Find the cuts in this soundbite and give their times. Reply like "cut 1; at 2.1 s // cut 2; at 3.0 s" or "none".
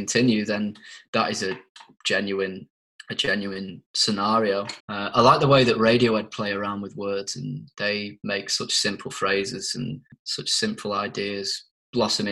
cut 1; at 4.8 s